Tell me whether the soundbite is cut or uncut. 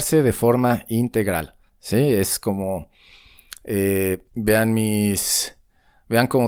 cut